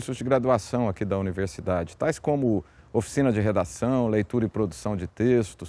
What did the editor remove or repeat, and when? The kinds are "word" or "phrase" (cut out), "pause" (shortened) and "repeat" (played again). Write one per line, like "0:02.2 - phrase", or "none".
none